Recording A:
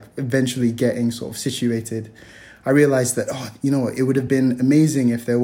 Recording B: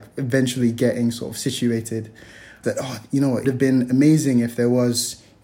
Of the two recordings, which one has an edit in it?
B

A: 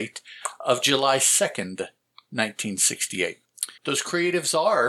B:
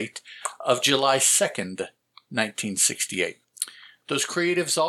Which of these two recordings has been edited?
A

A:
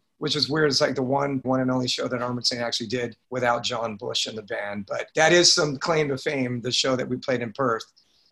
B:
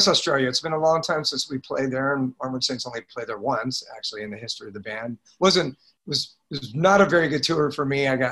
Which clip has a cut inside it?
A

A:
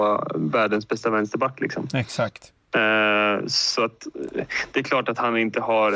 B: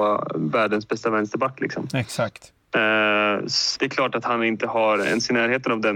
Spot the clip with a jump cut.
B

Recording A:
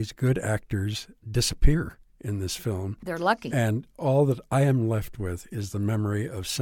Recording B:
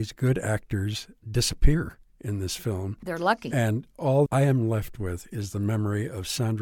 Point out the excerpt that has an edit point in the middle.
B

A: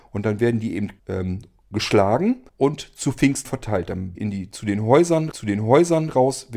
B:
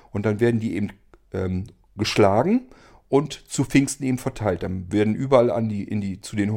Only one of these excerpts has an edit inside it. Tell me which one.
A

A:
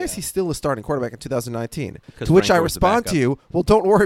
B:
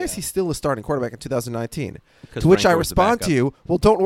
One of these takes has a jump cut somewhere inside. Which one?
A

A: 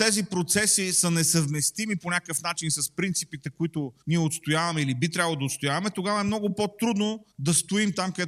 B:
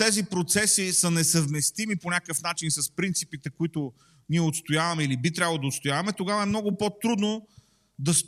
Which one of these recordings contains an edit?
A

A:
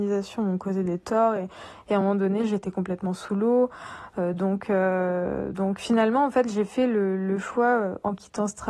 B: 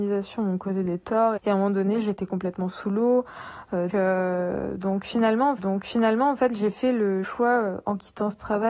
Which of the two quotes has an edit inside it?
B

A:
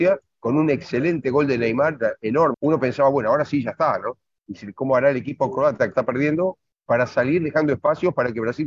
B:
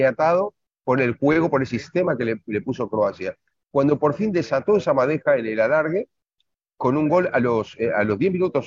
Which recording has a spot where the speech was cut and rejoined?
A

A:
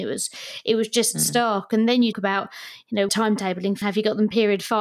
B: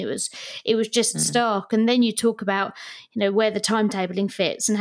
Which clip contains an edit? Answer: A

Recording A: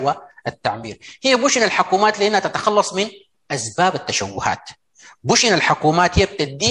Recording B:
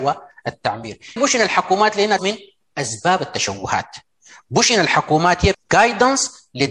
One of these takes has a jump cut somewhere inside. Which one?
B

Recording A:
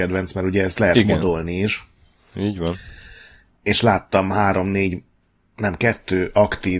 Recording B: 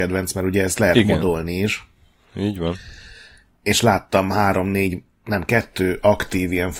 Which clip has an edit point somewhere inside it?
B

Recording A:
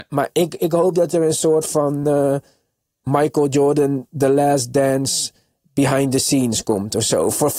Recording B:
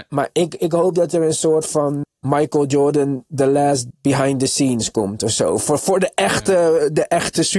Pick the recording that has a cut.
B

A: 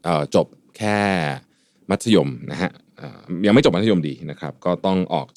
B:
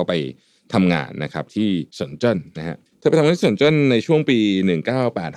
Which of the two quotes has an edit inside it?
B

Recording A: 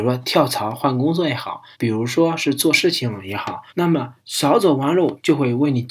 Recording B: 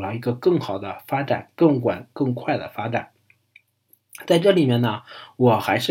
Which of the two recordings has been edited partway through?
A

